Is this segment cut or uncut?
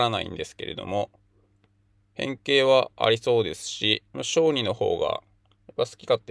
cut